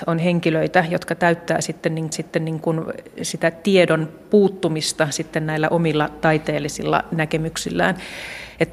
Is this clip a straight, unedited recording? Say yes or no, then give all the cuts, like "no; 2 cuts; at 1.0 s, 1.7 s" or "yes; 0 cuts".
no; 1 cut; at 2.1 s